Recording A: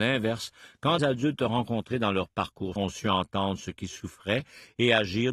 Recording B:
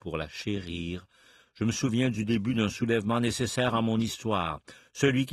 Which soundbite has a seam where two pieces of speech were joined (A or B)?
A